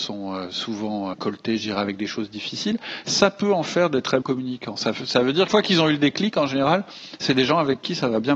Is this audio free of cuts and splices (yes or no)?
no